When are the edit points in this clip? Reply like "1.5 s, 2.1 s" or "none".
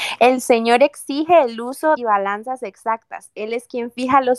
2.0 s